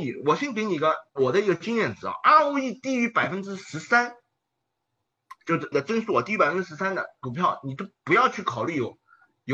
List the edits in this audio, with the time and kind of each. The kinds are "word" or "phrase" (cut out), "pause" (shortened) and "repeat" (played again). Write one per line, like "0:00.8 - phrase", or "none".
0:01.1 - pause
0:05.7 - word